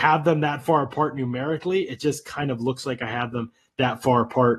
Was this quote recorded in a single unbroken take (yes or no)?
yes